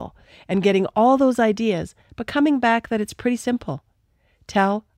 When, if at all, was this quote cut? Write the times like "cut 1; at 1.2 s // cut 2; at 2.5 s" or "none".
none